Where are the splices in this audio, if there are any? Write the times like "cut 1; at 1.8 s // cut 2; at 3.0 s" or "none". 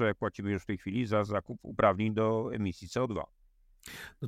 none